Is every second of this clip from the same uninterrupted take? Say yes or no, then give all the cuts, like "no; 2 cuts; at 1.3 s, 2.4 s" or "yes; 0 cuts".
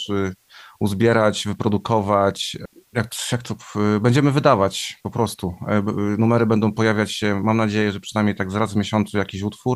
yes; 0 cuts